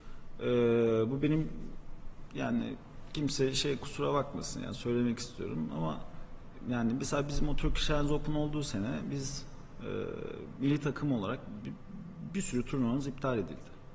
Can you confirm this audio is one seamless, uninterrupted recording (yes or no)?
yes